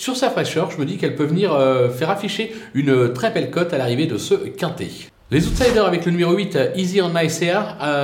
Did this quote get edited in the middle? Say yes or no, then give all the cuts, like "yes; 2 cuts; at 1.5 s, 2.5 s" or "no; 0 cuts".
no; 0 cuts